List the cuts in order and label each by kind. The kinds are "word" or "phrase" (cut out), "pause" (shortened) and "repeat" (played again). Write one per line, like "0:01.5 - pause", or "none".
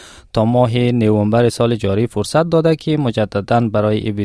none

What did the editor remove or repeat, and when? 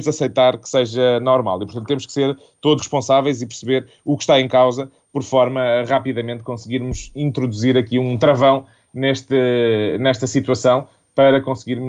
0:02.8 - word

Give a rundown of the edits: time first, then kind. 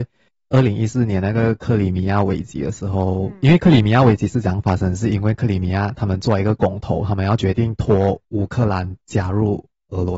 0:08.2 - pause

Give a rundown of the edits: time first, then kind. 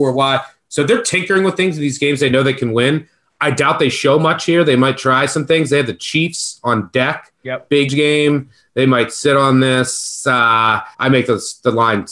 0:07.9 - word
0:10.9 - pause

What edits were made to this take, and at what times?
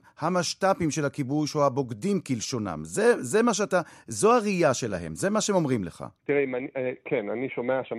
0:06.2 - pause

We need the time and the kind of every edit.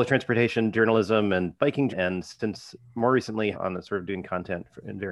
0:01.9 - word
0:03.5 - phrase

